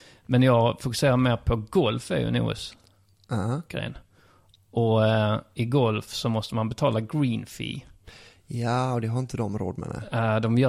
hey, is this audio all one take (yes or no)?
yes